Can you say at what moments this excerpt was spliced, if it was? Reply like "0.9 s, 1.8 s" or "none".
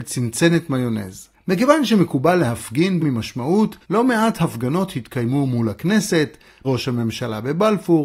1.3 s, 3.0 s, 3.8 s, 6.6 s